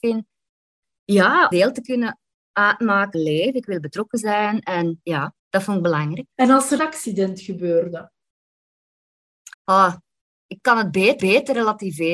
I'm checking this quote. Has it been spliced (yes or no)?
yes